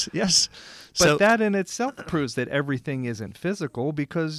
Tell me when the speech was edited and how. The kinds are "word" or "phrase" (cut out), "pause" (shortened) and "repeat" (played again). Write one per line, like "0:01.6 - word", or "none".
none